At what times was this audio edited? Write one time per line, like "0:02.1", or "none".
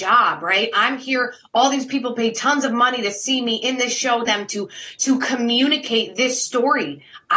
0:04.3